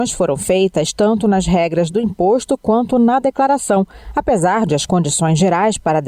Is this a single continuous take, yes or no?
yes